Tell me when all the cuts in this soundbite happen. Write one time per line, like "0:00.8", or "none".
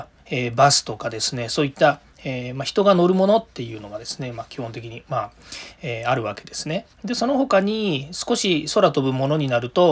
0:06.9